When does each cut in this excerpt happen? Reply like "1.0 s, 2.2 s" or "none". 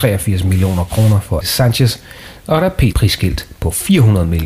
1.4 s, 2.9 s